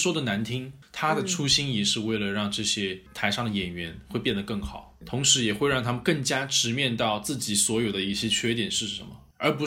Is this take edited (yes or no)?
yes